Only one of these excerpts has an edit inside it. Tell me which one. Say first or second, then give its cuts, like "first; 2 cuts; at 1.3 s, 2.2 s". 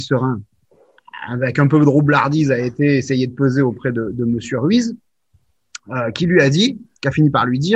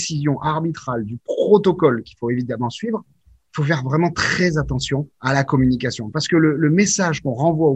second; 1 cut; at 5.1 s